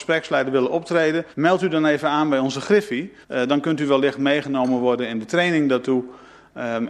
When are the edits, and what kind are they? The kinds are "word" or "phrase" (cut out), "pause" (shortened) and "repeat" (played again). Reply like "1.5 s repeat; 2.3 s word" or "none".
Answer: 1.3 s pause; 3.2 s pause